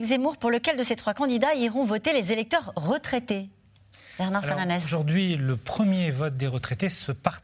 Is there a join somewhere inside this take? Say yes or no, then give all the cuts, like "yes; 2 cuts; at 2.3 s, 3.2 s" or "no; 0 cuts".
no; 0 cuts